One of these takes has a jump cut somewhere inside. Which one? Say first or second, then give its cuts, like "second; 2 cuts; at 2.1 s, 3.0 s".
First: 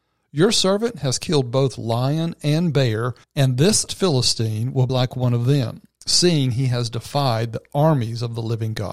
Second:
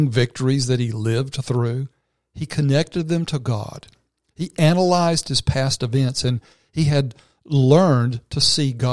first; 3 cuts; at 3.2 s, 3.9 s, 4.9 s